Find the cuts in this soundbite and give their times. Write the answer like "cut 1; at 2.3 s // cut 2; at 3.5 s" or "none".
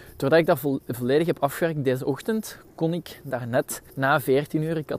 cut 1; at 3.9 s